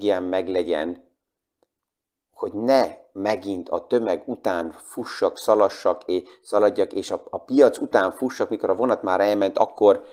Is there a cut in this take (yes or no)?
no